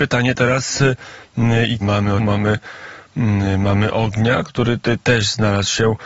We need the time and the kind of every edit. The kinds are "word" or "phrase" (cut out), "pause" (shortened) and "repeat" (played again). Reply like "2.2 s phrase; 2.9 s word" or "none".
1.8 s phrase; 2.2 s phrase